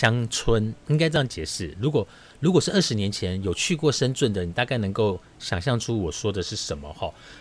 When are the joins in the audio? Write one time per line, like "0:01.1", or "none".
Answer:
none